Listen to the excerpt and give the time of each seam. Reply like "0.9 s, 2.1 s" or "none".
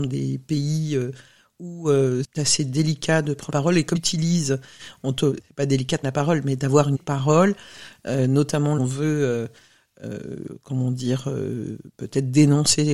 2.2 s, 3.5 s, 3.9 s, 5.4 s, 6.0 s, 6.9 s, 8.8 s